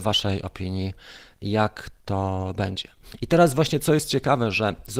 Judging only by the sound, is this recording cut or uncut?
uncut